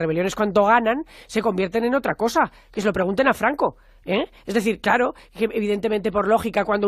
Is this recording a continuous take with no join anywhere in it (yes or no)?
yes